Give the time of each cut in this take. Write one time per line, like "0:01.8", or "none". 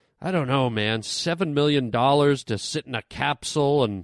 none